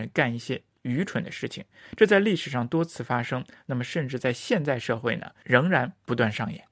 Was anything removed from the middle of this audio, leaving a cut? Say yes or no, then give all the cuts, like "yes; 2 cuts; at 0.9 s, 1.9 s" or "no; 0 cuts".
no; 0 cuts